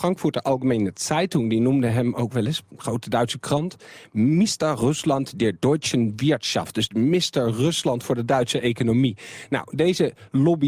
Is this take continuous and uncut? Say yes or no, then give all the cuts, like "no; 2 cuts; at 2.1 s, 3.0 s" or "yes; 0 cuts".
yes; 0 cuts